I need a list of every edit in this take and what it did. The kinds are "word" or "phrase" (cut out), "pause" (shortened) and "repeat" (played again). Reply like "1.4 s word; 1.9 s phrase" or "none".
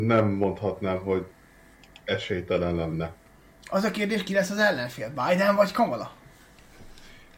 none

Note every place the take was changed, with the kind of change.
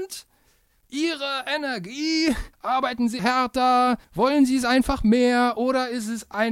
2.5 s pause; 3.2 s word; 4.0 s pause

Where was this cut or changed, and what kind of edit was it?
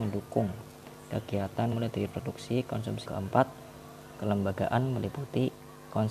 1.7 s word; 2.1 s word; 3.0 s phrase

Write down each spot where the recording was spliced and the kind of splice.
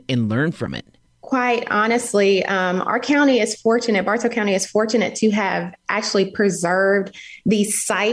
none

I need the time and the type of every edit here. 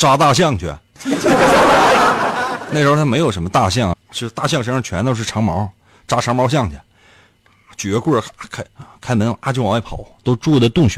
3.9 s phrase; 8.7 s pause

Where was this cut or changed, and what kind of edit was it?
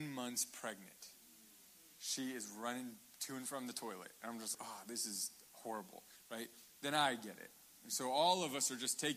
4.5 s word

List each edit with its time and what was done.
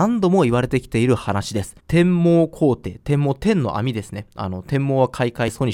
1.8 s pause

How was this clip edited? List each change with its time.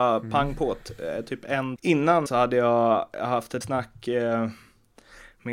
1.8 s word; 2.3 s word; 3.6 s word

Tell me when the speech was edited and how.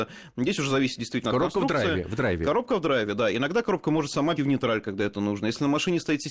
4.4 s word

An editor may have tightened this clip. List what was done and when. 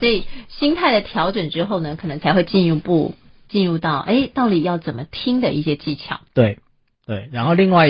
none

